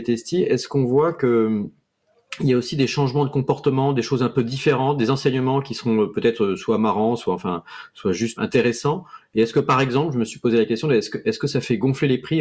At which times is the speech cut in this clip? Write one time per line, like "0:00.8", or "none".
0:08.4